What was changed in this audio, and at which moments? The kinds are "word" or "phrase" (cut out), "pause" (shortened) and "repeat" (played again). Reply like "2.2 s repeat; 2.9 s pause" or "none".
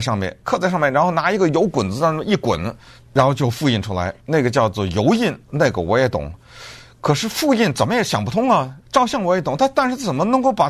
3.0 s pause; 4.2 s pause; 5.4 s pause; 8.8 s pause